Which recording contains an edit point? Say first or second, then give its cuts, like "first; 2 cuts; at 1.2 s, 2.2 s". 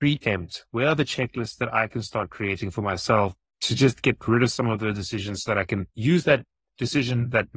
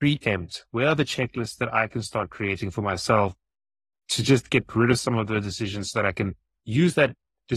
first; 2 cuts; at 3.5 s, 5.9 s